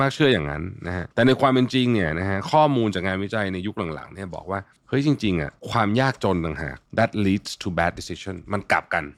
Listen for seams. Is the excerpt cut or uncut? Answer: cut